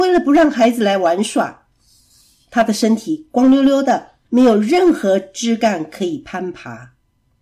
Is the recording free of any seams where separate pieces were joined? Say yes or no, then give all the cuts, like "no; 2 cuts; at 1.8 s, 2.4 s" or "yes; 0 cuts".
no; 1 cut; at 4.2 s